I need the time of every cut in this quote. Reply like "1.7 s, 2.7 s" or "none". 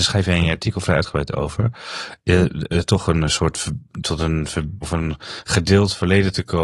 4.8 s

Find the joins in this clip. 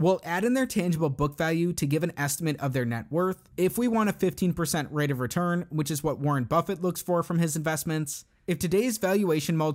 none

